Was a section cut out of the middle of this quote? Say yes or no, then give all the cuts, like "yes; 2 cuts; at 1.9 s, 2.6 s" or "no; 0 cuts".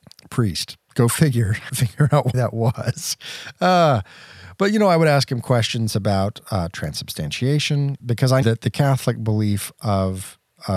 yes; 4 cuts; at 1.7 s, 2.3 s, 8.0 s, 8.4 s